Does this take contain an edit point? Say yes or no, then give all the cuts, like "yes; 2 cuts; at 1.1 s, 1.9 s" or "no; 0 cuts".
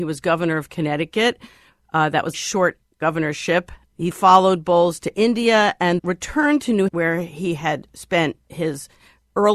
yes; 4 cuts; at 2.3 s, 4.1 s, 6.0 s, 6.9 s